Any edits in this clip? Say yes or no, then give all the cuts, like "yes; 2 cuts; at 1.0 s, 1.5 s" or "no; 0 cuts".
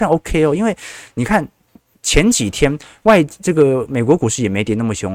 no; 0 cuts